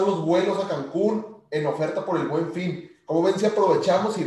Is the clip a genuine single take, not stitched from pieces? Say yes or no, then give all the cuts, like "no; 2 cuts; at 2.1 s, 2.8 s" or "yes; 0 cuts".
yes; 0 cuts